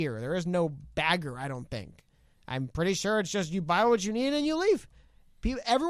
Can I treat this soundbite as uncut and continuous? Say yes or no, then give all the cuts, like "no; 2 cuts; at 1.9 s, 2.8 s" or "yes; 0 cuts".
yes; 0 cuts